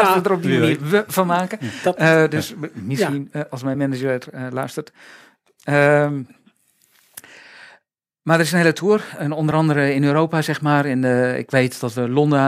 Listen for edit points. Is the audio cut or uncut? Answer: uncut